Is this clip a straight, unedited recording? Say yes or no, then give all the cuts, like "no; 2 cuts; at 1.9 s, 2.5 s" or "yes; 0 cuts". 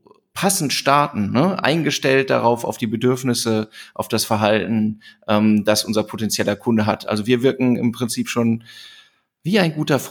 yes; 0 cuts